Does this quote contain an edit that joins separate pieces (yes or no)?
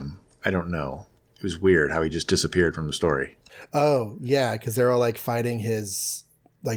no